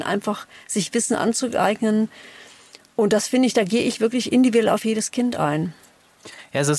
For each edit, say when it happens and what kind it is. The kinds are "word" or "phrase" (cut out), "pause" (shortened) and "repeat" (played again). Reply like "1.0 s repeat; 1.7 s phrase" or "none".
none